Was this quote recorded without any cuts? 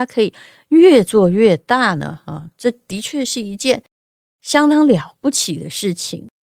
yes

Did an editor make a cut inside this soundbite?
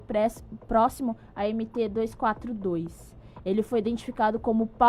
no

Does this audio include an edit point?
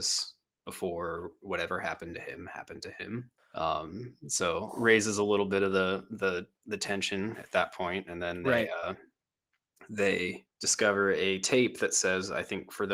yes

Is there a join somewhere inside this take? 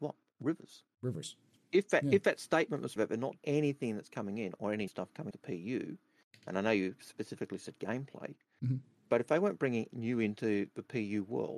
yes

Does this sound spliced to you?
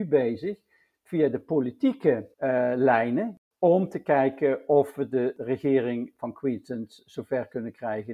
yes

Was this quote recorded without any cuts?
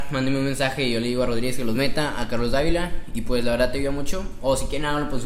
yes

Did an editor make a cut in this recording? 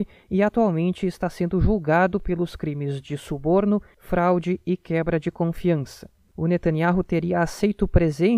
no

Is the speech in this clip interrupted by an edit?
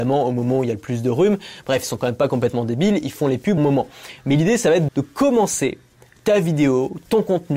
yes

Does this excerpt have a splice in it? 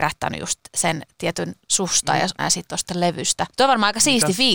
yes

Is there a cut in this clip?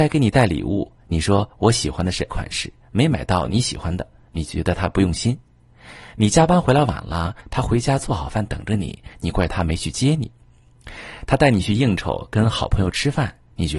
yes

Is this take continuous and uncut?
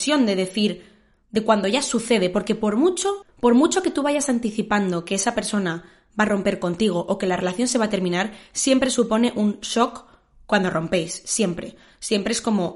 yes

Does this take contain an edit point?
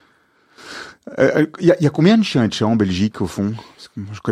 no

